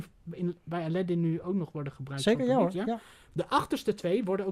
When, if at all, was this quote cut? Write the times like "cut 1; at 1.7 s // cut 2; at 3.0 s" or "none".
none